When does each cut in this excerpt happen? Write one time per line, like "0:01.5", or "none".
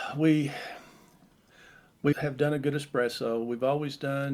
0:02.1

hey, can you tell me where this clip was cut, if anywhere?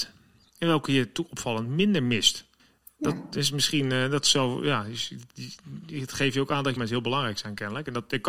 0:02.6
0:06.8

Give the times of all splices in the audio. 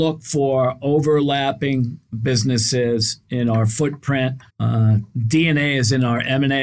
0:04.5

